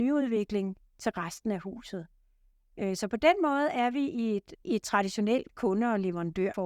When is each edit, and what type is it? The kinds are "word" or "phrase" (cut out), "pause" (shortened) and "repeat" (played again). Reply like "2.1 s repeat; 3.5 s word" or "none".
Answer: 4.6 s pause